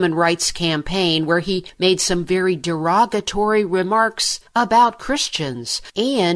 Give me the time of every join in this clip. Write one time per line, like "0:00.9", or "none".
none